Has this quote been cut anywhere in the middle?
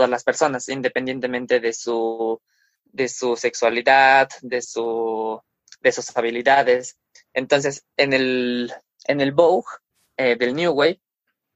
no; 0 cuts

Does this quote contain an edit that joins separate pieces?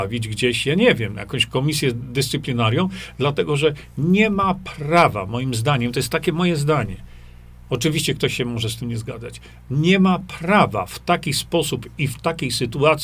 no; 0 cuts

